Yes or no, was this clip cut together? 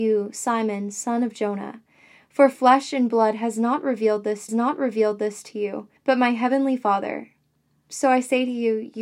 yes